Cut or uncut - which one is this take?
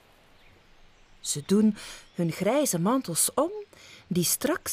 uncut